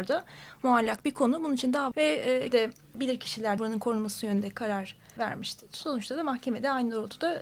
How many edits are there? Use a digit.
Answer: 5